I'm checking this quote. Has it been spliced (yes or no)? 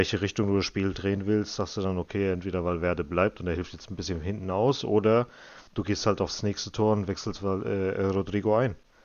yes